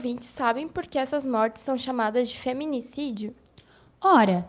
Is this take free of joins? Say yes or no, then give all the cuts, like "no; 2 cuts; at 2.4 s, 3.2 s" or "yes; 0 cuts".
yes; 0 cuts